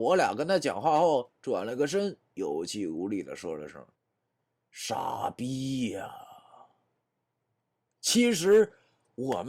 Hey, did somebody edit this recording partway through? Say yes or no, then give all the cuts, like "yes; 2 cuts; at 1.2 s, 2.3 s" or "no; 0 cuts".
yes; 2 cuts; at 3.9 s, 7.0 s